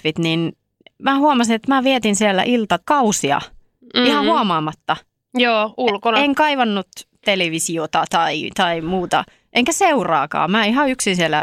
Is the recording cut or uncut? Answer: uncut